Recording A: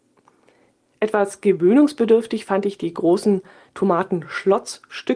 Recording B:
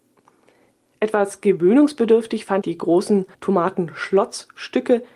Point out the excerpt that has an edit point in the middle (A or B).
B